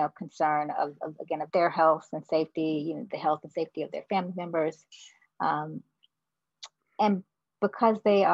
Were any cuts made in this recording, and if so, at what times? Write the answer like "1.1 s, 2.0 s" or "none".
1.5 s